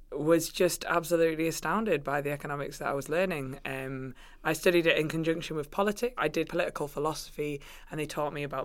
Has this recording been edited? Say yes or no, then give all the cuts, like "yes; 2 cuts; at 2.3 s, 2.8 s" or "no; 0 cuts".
yes; 2 cuts; at 6.2 s, 6.5 s